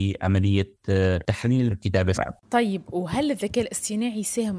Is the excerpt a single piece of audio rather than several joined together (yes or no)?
no